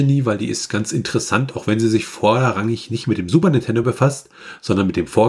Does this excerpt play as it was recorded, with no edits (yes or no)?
yes